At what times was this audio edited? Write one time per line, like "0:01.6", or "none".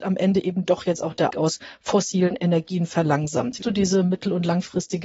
0:01.3
0:03.6